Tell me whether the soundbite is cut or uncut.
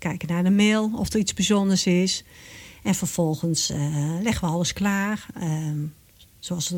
uncut